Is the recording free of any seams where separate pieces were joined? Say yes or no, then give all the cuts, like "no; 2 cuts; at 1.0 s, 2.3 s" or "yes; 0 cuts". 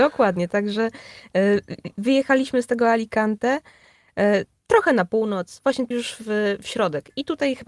no; 1 cut; at 5.9 s